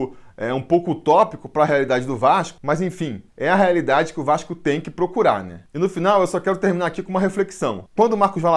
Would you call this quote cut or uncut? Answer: cut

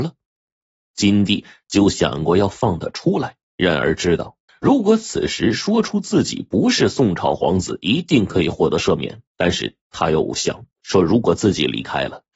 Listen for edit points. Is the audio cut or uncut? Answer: cut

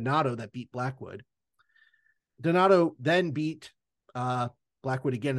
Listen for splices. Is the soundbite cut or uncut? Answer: uncut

